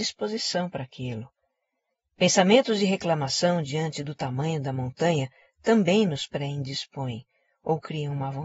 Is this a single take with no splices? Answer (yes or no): yes